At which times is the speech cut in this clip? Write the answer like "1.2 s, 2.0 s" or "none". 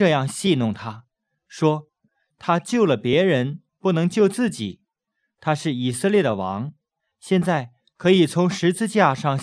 none